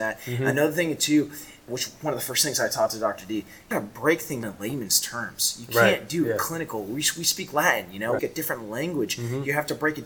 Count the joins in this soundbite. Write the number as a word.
four